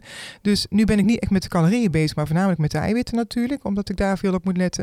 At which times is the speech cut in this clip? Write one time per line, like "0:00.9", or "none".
none